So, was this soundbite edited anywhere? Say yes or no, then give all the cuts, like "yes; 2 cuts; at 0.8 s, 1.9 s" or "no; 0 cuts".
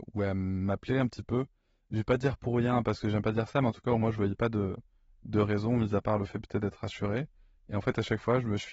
no; 0 cuts